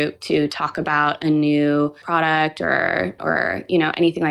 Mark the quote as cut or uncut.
cut